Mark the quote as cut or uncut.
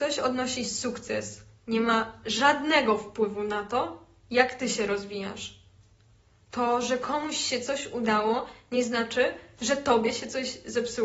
uncut